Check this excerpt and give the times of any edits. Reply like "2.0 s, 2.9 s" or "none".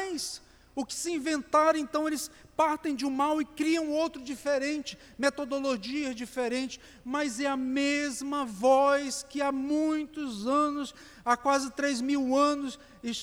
none